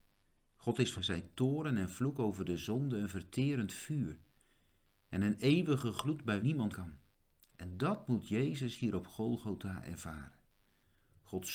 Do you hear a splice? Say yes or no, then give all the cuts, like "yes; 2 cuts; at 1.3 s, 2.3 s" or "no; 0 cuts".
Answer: yes; 3 cuts; at 0.9 s, 6.4 s, 6.7 s